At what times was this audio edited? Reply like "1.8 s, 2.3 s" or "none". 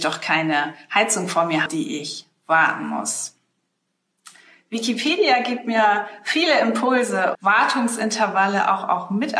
1.7 s, 7.3 s